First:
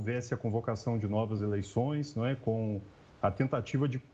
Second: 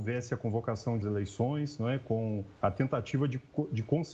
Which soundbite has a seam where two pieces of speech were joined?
second; 2 cuts; at 1.0 s, 2.6 s

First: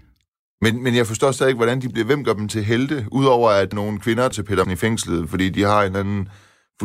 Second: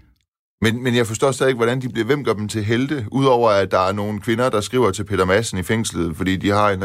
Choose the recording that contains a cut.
first; 3 cuts; at 3.7 s, 4.3 s, 4.6 s

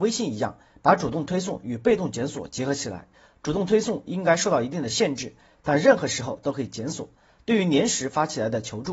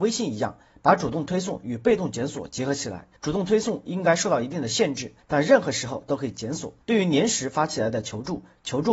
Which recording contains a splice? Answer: second; 3 cuts; at 3.2 s, 5.2 s, 6.8 s

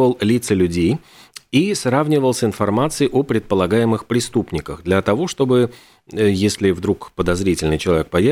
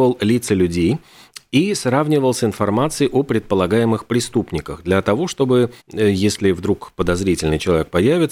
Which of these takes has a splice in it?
second; 1 cut; at 5.8 s

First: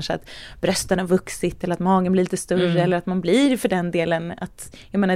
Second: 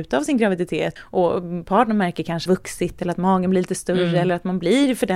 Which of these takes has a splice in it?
second; 2 cuts; at 1.0 s, 2.5 s

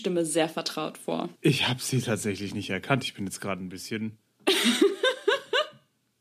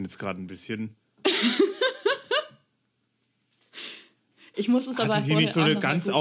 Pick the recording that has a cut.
first; 1 cut; at 1.4 s

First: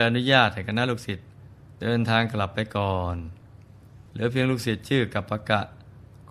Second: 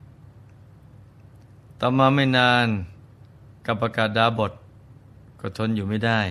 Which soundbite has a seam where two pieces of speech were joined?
first; 2 cuts; at 1.7 s, 4.1 s

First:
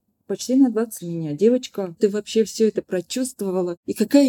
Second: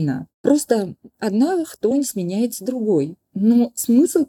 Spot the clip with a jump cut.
first; 2 cuts; at 1.0 s, 2.0 s

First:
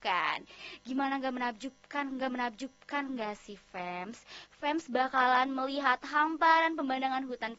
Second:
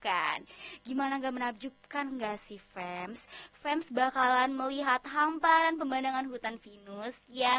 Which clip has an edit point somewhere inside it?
first; 1 cut; at 2.2 s

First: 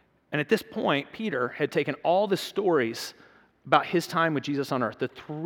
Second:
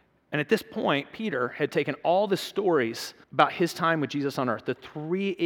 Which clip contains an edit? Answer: second; 1 cut; at 3.2 s

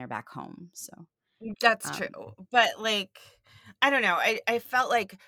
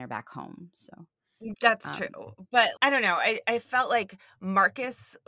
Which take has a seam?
second; 1 cut; at 2.8 s

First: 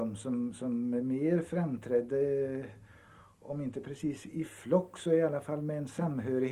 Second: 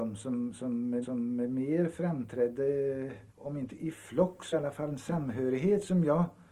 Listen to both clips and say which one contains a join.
second; 5 cuts; at 1.0 s, 3.3 s, 3.7 s, 4.5 s, 4.9 s

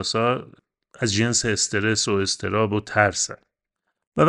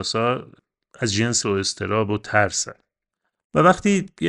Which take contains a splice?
second; 1 cut; at 1.4 s

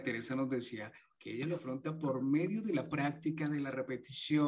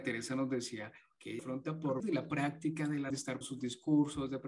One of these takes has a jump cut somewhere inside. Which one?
second; 4 cuts; at 1.4 s, 2.0 s, 3.1 s, 3.4 s

